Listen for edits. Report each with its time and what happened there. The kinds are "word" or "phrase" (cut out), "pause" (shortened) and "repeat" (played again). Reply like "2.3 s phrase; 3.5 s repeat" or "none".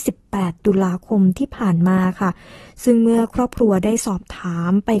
none